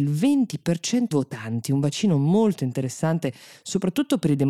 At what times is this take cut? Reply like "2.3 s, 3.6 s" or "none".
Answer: 1.1 s